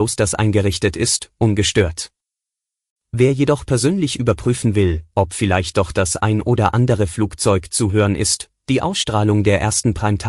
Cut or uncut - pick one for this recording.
uncut